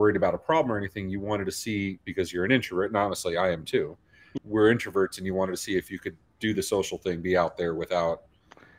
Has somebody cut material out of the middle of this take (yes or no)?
yes